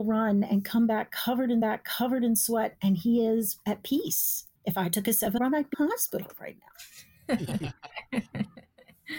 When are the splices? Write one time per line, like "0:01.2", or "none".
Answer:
0:01.6
0:04.6
0:05.4
0:05.7